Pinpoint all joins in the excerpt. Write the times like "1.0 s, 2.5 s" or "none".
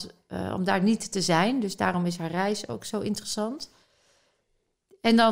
none